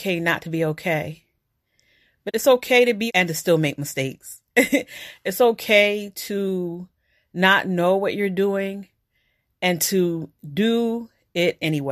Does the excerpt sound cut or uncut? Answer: cut